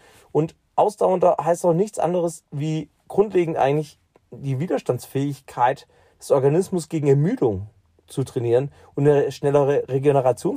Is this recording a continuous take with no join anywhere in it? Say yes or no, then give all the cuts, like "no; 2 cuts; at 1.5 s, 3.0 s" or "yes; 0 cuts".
yes; 0 cuts